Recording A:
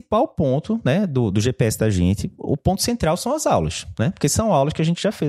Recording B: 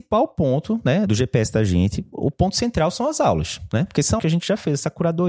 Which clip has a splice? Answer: B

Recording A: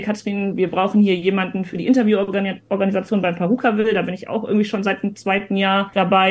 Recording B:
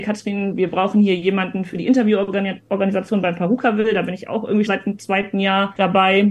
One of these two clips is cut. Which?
B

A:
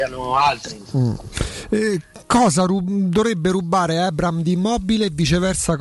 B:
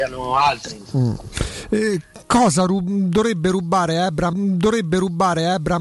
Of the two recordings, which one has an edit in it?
B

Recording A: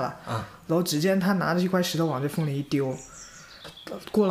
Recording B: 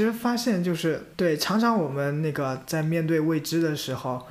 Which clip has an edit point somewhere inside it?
B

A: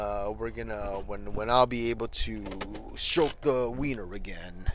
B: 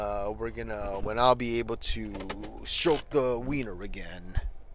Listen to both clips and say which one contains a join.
B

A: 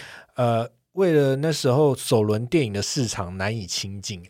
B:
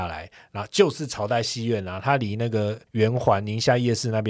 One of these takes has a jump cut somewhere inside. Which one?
B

